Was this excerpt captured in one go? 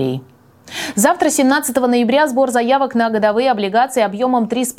yes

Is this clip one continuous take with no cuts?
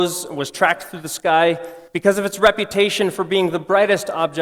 no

